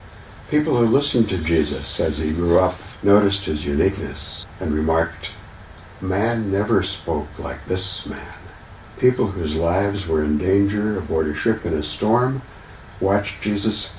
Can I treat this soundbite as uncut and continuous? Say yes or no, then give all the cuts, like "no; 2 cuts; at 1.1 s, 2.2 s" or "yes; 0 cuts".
yes; 0 cuts